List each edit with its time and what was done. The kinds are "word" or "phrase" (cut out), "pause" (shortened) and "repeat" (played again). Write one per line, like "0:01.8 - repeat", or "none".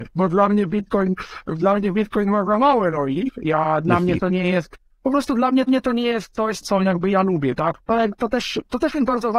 0:05.7 - repeat
0:06.6 - word
0:07.8 - pause